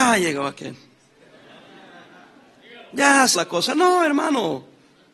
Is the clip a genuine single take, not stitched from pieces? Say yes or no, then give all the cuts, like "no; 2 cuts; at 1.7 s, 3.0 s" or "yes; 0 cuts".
no; 1 cut; at 3.3 s